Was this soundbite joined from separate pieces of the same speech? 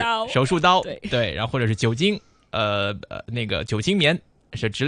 no; 0 cuts

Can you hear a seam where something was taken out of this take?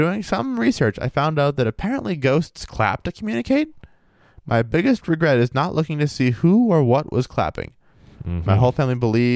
no; 0 cuts

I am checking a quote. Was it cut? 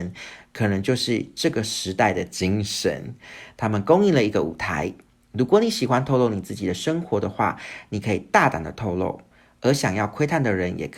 no; 0 cuts

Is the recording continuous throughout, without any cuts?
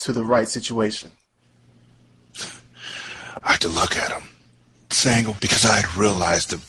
no; 3 cuts; at 3.6 s, 4.9 s, 5.4 s

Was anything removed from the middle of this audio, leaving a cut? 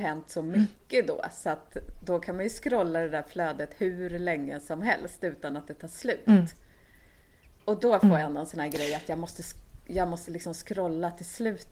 no; 0 cuts

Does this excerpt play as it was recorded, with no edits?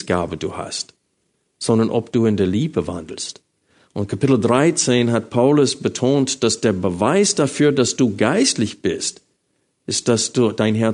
yes; 0 cuts

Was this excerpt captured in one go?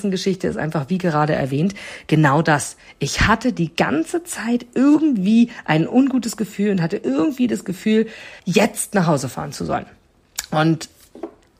no; 1 cut; at 8.4 s

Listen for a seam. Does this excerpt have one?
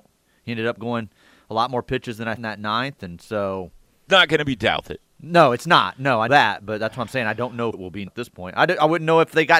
yes; 5 cuts; at 2.4 s, 4.1 s, 6.3 s, 7.7 s, 8.1 s

